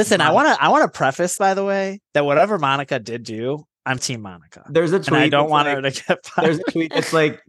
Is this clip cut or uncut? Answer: cut